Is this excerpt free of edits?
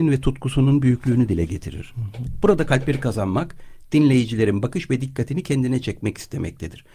yes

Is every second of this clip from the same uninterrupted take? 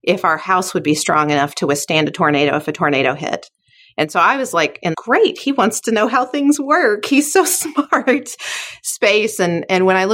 no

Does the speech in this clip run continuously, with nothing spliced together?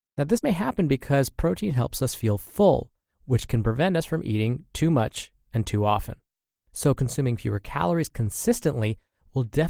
yes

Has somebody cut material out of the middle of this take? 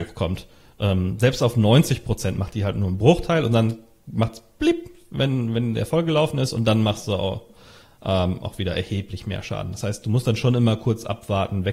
no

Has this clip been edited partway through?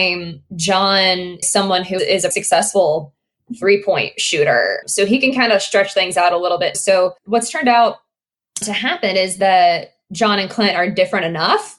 yes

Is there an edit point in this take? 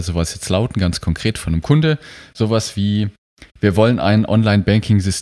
yes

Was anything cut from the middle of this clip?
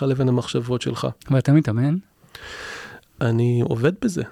yes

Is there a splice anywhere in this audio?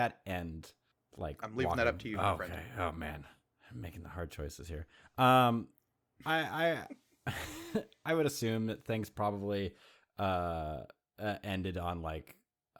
no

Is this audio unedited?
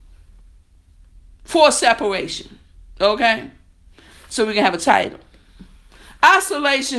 yes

